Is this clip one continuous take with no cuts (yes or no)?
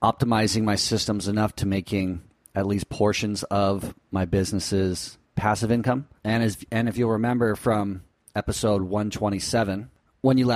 no